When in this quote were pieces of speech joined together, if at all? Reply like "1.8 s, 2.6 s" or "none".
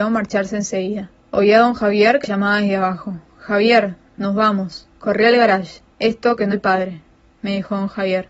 1.2 s, 2.2 s, 4.9 s, 5.9 s, 6.5 s